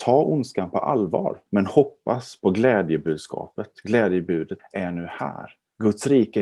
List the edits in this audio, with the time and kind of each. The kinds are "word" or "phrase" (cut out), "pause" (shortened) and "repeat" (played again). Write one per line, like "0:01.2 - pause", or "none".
0:01.5 - pause
0:04.6 - phrase